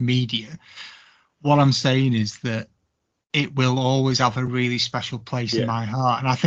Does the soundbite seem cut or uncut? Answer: uncut